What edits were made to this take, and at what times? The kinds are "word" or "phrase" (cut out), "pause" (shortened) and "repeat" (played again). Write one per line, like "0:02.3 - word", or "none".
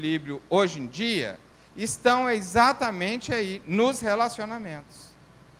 0:01.5 - pause